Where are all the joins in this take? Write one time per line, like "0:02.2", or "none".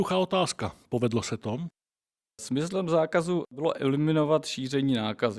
none